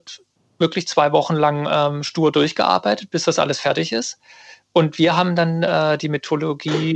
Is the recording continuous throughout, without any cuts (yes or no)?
yes